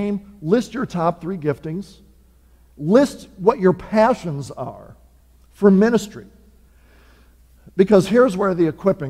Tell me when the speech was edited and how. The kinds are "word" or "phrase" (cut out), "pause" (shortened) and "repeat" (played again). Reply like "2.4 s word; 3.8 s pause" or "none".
none